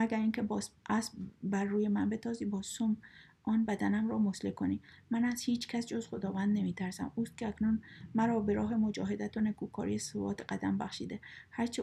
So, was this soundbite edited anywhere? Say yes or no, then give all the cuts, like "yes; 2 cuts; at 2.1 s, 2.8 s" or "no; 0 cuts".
no; 0 cuts